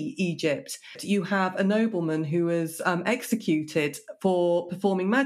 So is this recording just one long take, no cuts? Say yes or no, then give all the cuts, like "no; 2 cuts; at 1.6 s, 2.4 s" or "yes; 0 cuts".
yes; 0 cuts